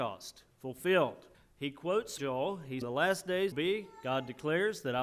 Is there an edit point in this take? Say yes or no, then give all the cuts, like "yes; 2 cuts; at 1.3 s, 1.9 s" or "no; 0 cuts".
yes; 4 cuts; at 1.3 s, 2.2 s, 2.8 s, 3.5 s